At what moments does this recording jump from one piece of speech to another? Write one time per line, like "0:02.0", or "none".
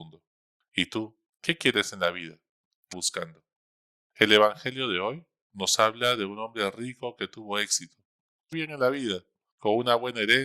0:02.9
0:08.5